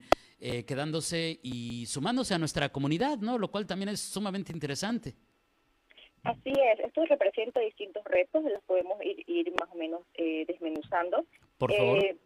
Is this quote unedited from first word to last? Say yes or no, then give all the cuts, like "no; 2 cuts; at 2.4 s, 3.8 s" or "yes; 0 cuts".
yes; 0 cuts